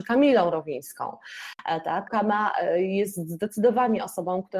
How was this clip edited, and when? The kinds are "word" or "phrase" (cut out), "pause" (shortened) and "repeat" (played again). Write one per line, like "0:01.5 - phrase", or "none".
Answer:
0:02.1 - word